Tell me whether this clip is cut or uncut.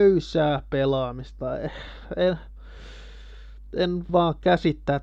cut